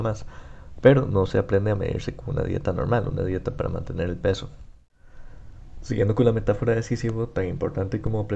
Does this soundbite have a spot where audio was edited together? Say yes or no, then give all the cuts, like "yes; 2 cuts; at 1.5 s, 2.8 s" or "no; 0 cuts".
no; 0 cuts